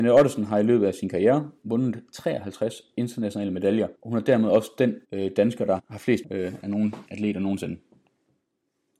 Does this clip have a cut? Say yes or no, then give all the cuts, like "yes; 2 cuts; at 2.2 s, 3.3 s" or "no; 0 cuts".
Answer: yes; 6 cuts; at 1.6 s, 3.9 s, 5.0 s, 5.8 s, 6.2 s, 7.1 s